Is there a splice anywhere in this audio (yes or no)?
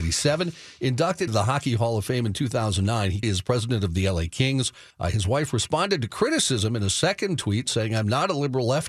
yes